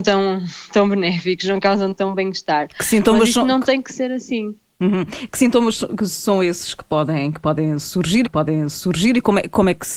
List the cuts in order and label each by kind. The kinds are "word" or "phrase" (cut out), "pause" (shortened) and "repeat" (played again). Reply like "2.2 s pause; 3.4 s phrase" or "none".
8.2 s repeat